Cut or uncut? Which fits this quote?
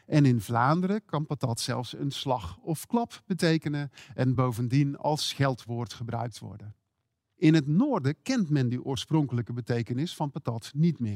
uncut